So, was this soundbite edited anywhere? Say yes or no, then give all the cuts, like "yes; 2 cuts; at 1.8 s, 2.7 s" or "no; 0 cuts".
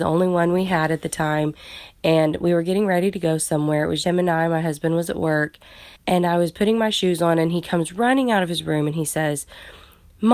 yes; 2 cuts; at 4.0 s, 6.0 s